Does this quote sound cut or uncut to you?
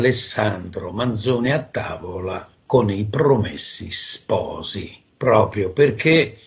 uncut